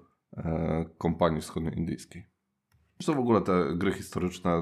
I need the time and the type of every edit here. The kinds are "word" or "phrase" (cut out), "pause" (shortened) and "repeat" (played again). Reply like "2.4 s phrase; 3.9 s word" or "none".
none